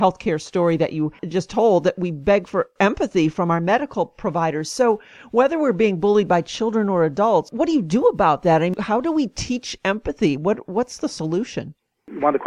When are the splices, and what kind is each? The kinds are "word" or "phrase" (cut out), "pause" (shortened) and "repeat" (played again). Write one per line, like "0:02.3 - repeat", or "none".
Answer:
none